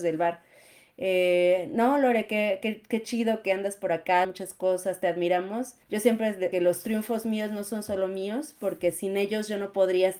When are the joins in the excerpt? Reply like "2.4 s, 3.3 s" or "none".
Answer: 3.9 s, 4.2 s, 5.8 s, 6.5 s

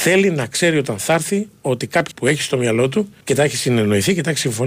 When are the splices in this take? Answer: 2.1 s, 3.2 s

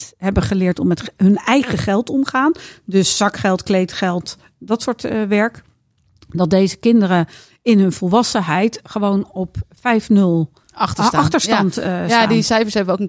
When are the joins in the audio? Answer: 10.6 s

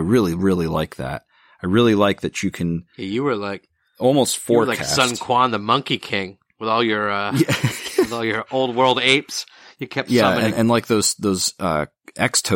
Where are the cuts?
none

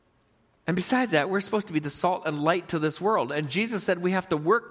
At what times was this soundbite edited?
none

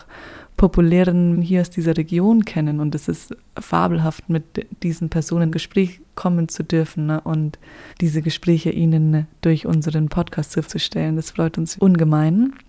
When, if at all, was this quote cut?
1.3 s, 5.5 s, 7.9 s, 10.7 s, 11.8 s

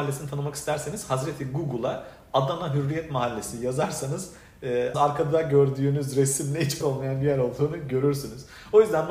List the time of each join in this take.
4.9 s, 6.8 s

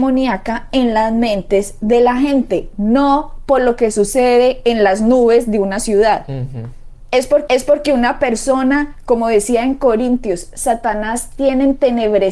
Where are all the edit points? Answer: 7.5 s

